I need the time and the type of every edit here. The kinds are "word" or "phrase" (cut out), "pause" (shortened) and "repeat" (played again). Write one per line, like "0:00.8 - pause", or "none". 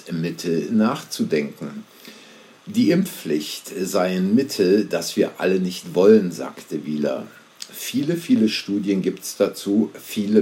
none